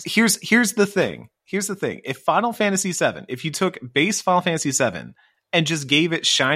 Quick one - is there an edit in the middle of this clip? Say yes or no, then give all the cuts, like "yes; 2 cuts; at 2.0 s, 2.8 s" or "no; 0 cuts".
no; 0 cuts